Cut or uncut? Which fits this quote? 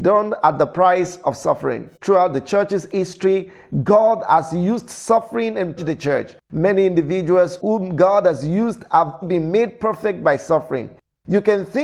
cut